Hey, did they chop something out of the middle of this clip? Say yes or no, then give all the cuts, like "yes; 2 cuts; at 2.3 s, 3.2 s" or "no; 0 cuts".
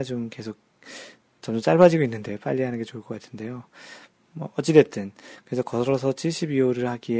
no; 0 cuts